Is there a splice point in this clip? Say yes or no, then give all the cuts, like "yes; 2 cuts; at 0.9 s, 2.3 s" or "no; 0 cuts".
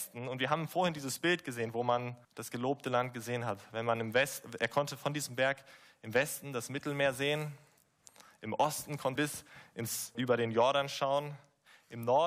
yes; 3 cuts; at 2.2 s, 9.2 s, 10.1 s